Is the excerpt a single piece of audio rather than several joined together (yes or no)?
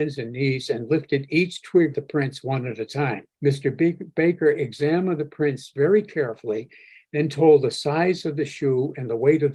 no